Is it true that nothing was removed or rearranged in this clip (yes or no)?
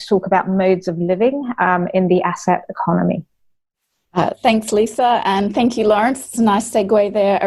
yes